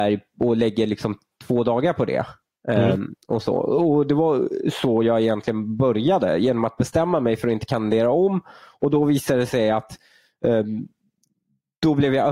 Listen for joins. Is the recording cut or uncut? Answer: uncut